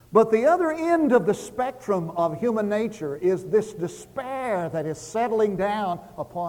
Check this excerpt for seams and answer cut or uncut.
uncut